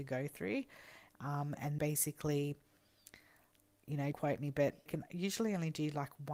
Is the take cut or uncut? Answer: cut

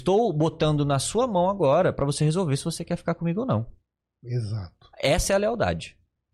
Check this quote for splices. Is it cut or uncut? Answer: uncut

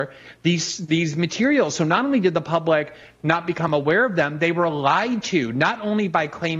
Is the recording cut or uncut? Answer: uncut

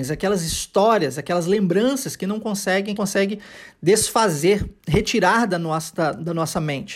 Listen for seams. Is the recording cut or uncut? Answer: cut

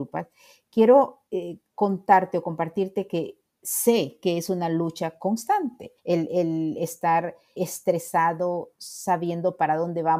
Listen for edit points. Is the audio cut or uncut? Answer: cut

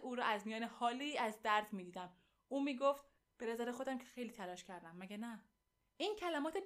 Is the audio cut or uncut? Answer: uncut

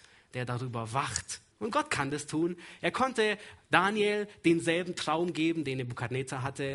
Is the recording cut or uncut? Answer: cut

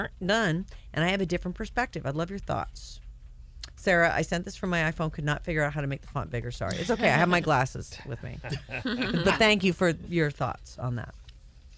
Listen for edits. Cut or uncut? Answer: uncut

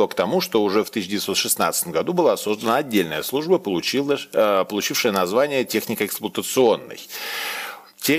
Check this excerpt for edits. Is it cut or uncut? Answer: uncut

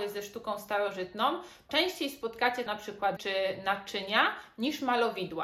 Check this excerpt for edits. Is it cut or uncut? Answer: cut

